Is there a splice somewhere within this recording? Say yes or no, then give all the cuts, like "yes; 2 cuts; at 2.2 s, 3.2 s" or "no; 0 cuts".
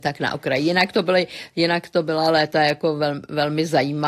no; 0 cuts